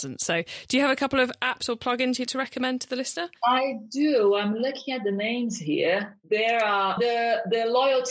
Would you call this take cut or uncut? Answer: cut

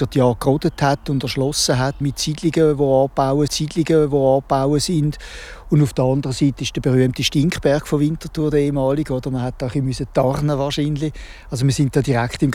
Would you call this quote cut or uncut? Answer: cut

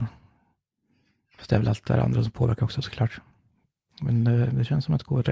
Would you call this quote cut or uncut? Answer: uncut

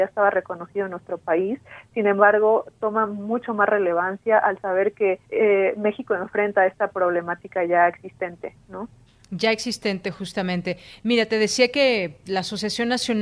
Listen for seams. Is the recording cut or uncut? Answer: cut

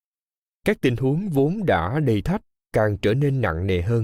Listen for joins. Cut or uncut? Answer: cut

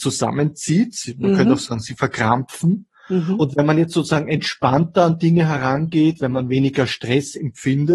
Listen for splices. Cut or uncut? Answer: uncut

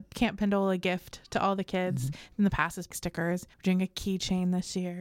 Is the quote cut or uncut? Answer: cut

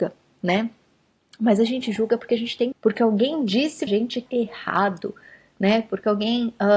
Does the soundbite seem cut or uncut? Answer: cut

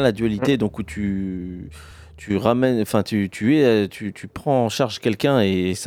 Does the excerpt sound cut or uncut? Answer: uncut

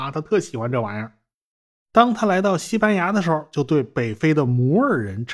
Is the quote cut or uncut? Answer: uncut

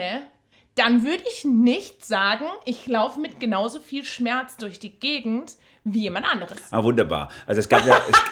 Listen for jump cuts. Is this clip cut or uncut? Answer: uncut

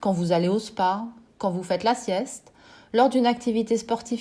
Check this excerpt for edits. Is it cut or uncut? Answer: uncut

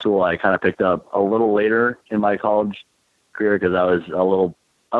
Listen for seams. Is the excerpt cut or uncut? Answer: uncut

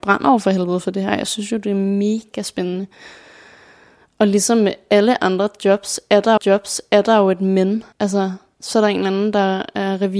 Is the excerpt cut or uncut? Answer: cut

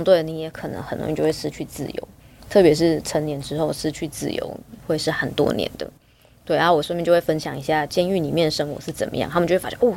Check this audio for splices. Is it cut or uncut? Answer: uncut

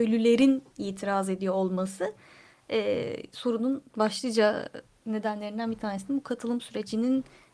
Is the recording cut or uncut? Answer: uncut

